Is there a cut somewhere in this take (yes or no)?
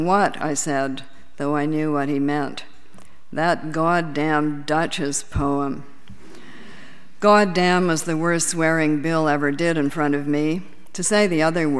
no